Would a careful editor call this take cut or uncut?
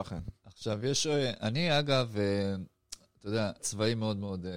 cut